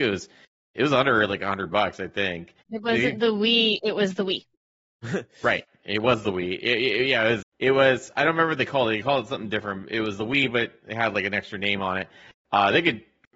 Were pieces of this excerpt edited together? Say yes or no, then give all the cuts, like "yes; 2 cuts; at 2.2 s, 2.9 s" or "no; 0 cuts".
yes; 3 cuts; at 2.6 s, 4.5 s, 7.4 s